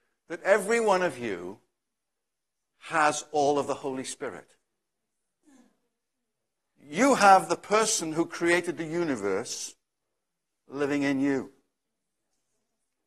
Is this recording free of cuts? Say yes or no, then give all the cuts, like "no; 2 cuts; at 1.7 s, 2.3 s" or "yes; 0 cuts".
yes; 0 cuts